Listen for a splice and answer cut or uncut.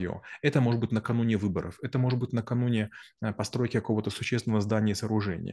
uncut